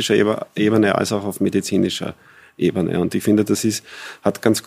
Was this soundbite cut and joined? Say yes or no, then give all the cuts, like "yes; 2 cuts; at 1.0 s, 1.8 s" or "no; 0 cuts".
no; 0 cuts